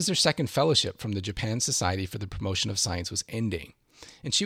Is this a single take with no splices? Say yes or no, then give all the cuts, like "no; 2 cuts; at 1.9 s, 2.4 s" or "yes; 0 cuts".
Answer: yes; 0 cuts